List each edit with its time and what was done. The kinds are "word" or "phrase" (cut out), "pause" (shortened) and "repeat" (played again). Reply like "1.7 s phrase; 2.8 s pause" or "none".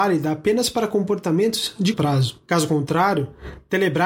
1.9 s word